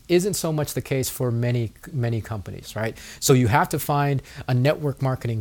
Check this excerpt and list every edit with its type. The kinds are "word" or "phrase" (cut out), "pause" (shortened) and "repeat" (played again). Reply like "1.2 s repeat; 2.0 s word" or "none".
none